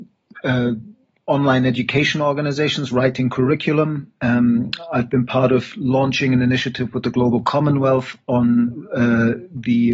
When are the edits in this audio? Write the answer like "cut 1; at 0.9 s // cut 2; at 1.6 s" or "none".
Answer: none